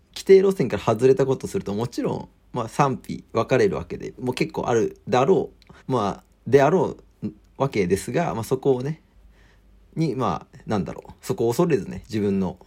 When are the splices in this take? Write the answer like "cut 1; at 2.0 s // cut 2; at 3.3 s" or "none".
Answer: cut 1; at 4.2 s // cut 2; at 5.8 s // cut 3; at 11.2 s